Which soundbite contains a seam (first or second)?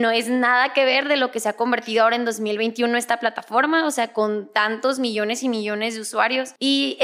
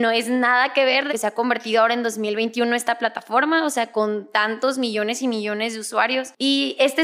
second